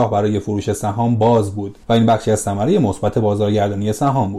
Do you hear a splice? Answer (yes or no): yes